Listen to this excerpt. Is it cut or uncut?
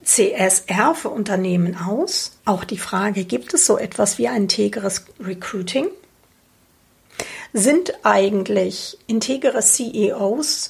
cut